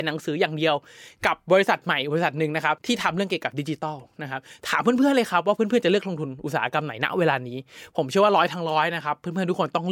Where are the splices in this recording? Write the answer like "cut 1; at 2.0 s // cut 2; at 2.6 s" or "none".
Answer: cut 1; at 2.8 s